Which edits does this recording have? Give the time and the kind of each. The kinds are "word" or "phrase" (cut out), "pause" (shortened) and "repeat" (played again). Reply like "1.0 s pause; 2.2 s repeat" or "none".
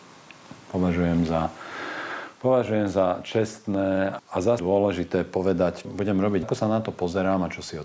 4.2 s word; 4.6 s word; 5.8 s word; 6.4 s word

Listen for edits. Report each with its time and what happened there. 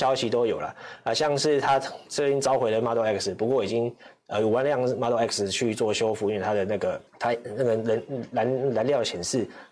7.1 s pause

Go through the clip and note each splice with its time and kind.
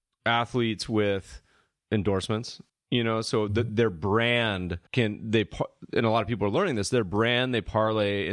2.7 s pause; 4.9 s pause

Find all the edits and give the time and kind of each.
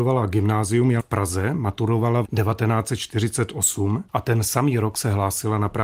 1.0 s word; 2.2 s word; 4.1 s pause

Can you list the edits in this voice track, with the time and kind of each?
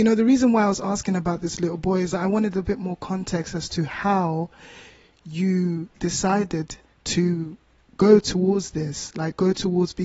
none

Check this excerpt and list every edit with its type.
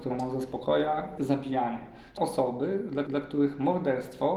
1.2 s word; 2.2 s word; 3.1 s repeat

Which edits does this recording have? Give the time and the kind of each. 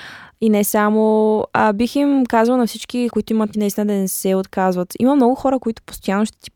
3.1 s word; 3.5 s word

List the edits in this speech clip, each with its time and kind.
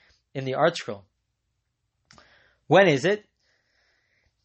none

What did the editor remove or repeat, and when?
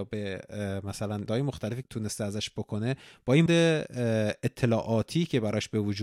1.3 s word; 1.8 s word; 3.5 s word

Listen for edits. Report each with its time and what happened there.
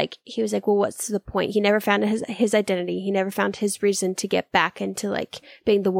none

